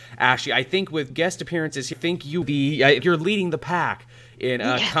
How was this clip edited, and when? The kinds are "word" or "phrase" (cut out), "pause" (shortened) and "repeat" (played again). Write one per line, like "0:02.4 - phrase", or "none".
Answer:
0:01.1 - word
0:01.9 - word
0:02.4 - word
0:03.0 - word